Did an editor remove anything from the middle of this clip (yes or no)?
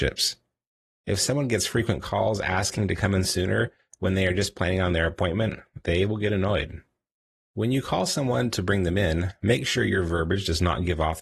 no